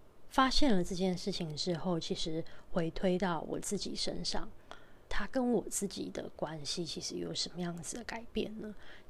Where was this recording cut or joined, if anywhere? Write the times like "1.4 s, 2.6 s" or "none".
5.1 s